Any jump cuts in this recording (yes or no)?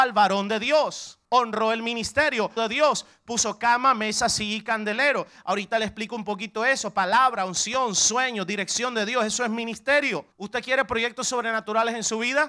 yes